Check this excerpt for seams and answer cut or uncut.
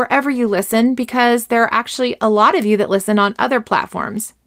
uncut